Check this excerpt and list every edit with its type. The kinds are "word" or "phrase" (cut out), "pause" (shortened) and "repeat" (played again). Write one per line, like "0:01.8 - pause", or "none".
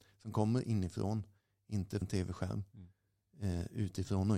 0:02.0 - word

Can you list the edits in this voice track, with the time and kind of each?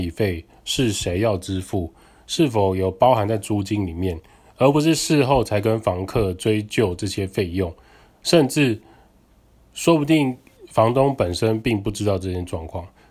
none

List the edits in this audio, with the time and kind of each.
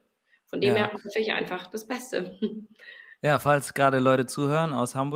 none

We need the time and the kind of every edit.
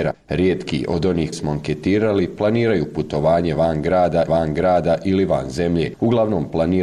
0:01.3 - word
0:04.3 - repeat

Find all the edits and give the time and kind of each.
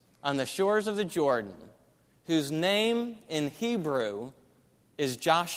none

